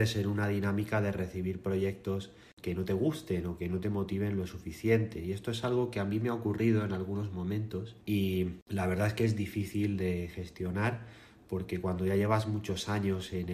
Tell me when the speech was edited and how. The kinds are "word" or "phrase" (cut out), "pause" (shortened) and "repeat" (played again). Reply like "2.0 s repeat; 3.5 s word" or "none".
8.0 s pause